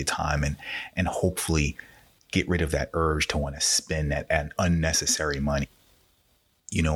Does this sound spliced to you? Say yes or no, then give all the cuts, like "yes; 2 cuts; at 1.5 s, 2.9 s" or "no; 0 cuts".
no; 0 cuts